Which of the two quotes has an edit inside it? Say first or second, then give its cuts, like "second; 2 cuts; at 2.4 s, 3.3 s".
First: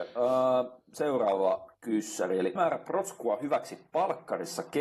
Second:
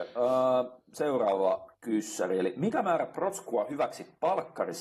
first; 1 cut; at 2.6 s